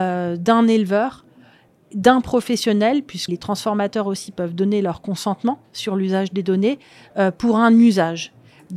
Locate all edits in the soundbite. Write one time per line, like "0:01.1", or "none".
0:03.3